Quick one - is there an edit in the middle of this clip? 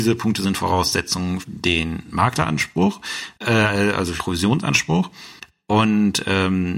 yes; 3 cuts; at 1.4 s, 3.3 s, 4.2 s

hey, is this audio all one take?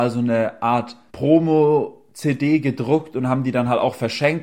no; 1 cut; at 1.1 s

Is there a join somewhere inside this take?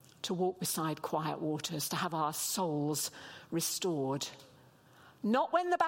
no; 0 cuts

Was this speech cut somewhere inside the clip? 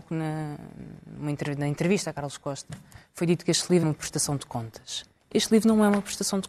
yes; 1 cut; at 3.8 s

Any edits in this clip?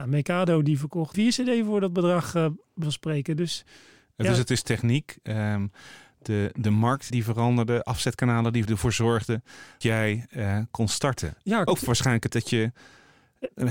yes; 8 cuts; at 1.1 s, 2.8 s, 7.1 s, 8.7 s, 9.8 s, 10.7 s, 11.7 s, 12.3 s

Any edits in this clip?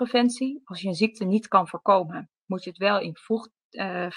no; 0 cuts

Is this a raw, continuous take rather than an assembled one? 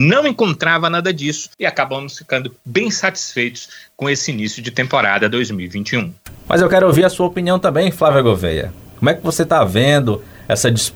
no; 2 cuts; at 1.5 s, 6.4 s

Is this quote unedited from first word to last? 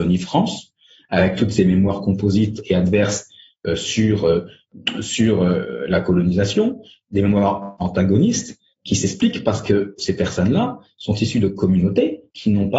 yes; 0 cuts

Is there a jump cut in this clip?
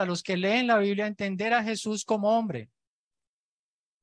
no; 0 cuts

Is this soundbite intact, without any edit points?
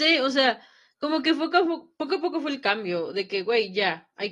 yes; 0 cuts

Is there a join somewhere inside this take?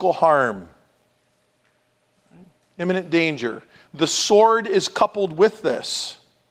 no; 0 cuts

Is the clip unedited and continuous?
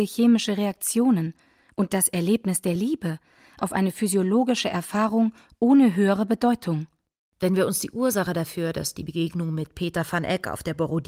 yes; 0 cuts

